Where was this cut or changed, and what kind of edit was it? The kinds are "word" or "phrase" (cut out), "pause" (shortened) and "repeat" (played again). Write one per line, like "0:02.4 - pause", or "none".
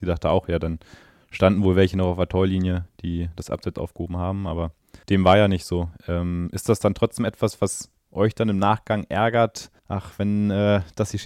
0:05.0 - pause
0:09.8 - pause